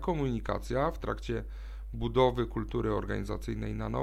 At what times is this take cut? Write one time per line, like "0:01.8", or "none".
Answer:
none